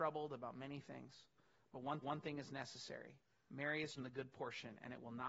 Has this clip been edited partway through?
yes; 2 cuts; at 2.0 s, 4.0 s

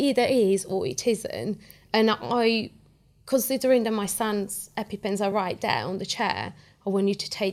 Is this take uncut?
yes; 0 cuts

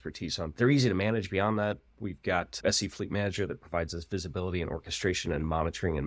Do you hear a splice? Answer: no; 0 cuts

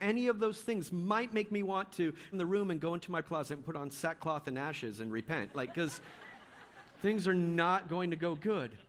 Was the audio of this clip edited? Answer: yes; 2 cuts; at 2.3 s, 3.2 s

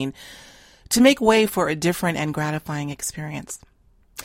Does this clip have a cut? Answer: no; 0 cuts

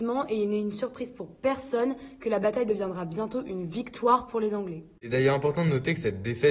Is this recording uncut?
yes; 0 cuts

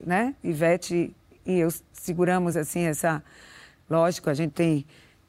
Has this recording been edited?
no; 0 cuts

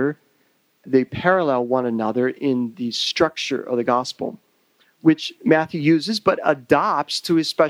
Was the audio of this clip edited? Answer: no; 0 cuts

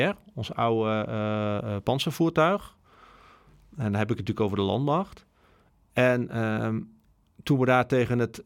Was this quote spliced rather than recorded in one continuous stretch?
no; 0 cuts

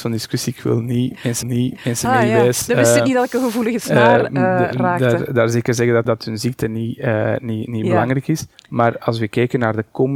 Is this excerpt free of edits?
no; 3 cuts; at 1.4 s, 6.0 s, 8.5 s

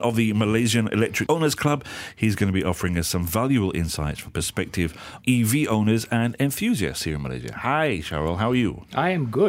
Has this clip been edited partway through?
yes; 3 cuts; at 1.3 s, 4.3 s, 5.2 s

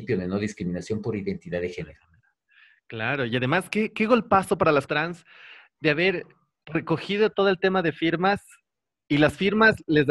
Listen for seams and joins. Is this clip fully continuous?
no; 1 cut; at 4.9 s

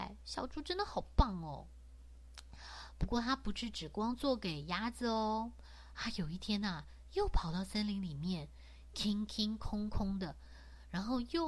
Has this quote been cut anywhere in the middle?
no; 0 cuts

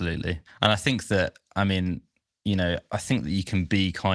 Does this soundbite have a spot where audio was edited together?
no; 0 cuts

